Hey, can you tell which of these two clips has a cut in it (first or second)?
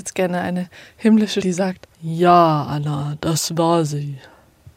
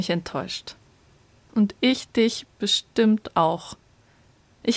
first